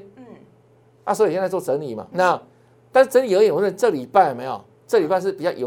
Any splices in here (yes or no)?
yes